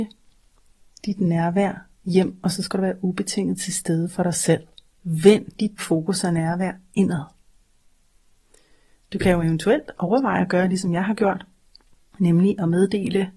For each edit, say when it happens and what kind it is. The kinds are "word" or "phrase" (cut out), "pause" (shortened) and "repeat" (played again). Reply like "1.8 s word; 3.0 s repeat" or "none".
4.9 s pause; 5.8 s word